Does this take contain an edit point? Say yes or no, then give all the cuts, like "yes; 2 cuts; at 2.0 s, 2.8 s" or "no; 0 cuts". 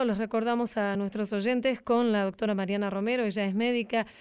no; 0 cuts